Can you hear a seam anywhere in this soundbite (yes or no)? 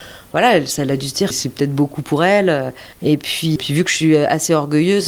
yes